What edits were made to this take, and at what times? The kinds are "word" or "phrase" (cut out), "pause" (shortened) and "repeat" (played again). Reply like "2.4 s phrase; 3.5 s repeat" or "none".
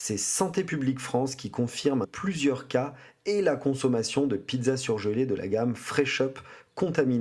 2.0 s phrase